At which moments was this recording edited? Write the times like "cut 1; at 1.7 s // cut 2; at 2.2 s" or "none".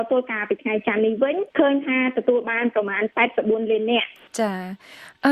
cut 1; at 1.5 s